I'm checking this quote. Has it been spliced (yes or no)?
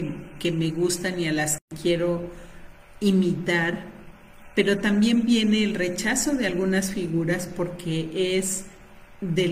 no